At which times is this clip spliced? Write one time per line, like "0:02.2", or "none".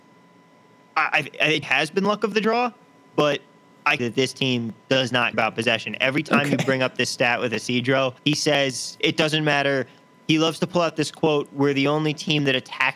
0:01.6
0:04.0
0:05.3
0:08.2